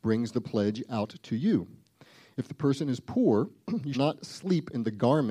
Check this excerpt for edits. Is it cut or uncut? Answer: cut